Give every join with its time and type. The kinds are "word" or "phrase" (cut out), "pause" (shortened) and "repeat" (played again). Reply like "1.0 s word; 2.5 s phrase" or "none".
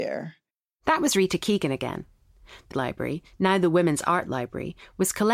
2.7 s phrase

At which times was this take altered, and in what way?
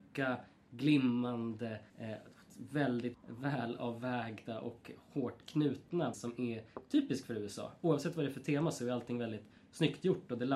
1.9 s pause; 3.1 s word; 6.1 s word

